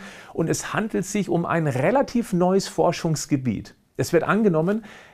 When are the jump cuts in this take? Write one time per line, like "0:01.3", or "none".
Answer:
none